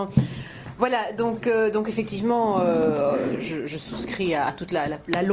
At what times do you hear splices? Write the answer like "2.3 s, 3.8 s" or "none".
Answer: none